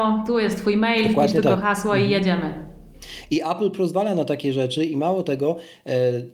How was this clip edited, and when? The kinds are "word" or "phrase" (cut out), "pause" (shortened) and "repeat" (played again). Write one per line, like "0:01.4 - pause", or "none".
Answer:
none